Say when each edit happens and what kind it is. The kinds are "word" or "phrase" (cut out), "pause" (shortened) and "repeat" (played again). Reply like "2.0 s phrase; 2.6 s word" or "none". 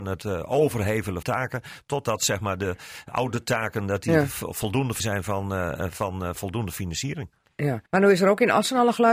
1.2 s word; 5.0 s phrase; 7.9 s pause